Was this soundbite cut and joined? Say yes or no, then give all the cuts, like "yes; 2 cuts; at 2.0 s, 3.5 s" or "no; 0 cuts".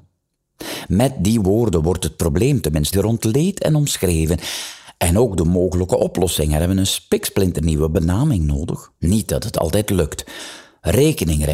yes; 2 cuts; at 2.9 s, 9.0 s